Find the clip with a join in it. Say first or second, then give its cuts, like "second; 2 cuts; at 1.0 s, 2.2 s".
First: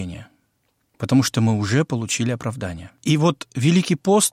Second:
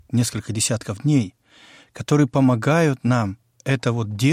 first; 1 cut; at 3.0 s